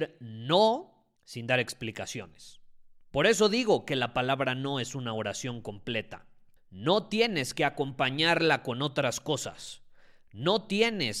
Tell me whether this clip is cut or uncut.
cut